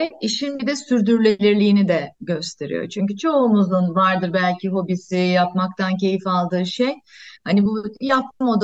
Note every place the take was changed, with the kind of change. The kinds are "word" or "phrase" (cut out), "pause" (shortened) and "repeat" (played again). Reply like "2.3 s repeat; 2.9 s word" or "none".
none